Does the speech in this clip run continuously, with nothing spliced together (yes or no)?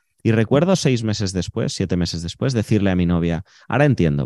yes